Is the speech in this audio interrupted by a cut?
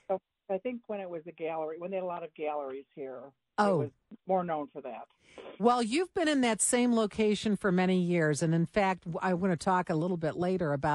yes; 1 cut; at 4.2 s

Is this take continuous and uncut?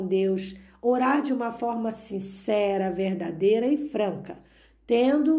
yes; 0 cuts

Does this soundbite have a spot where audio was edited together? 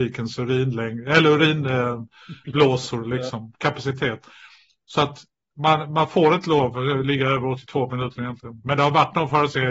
no; 0 cuts

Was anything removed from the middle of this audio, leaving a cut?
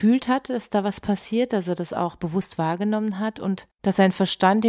yes; 1 cut; at 3.7 s

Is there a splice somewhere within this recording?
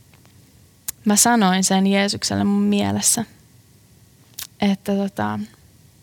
yes; 1 cut; at 1.0 s

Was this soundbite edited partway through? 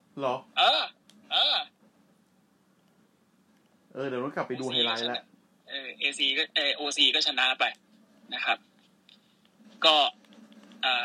no; 0 cuts

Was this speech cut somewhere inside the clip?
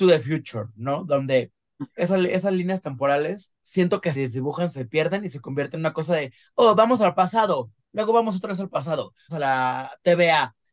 yes; 3 cuts; at 3.6 s, 4.2 s, 9.3 s

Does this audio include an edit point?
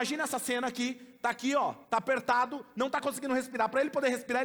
yes; 1 cut; at 1.8 s

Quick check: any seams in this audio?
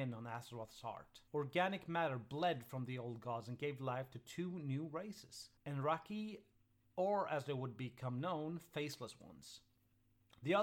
yes; 2 cuts; at 1.3 s, 5.6 s

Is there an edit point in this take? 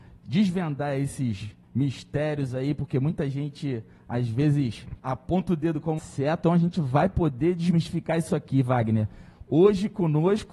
yes; 4 cuts; at 1.6 s, 5.0 s, 6.0 s, 6.4 s

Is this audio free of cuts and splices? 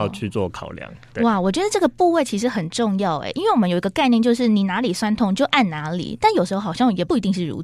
yes; 0 cuts

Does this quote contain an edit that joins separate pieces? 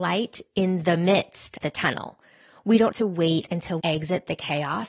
yes; 3 cuts; at 1.6 s, 2.9 s, 3.8 s

